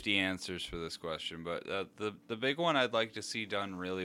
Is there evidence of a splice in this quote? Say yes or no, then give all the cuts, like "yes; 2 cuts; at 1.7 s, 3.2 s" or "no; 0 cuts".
no; 0 cuts